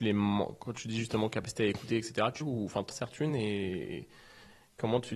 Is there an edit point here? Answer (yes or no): yes